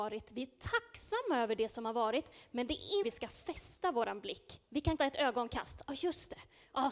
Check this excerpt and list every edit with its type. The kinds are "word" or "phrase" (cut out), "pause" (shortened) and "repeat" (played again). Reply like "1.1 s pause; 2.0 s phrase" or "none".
3.0 s phrase; 5.0 s word